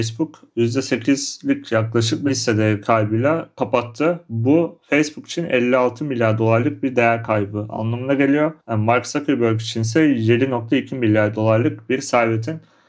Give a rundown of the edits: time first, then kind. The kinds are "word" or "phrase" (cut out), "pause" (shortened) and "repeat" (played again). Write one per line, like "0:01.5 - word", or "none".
0:08.6 - pause